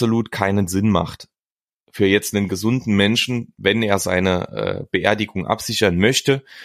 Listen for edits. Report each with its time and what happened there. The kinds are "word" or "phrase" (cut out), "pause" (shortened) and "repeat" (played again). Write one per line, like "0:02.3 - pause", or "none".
none